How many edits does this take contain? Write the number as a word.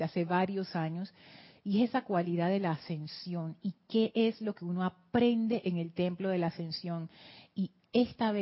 zero